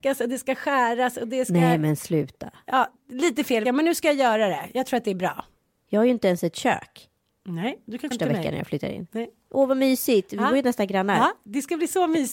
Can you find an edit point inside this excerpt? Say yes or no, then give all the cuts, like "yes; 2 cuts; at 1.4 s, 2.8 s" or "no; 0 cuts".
yes; 2 cuts; at 3.6 s, 8.1 s